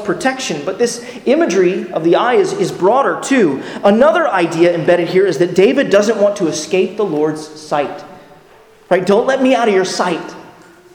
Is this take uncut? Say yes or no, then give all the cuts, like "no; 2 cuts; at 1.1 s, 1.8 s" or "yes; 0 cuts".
yes; 0 cuts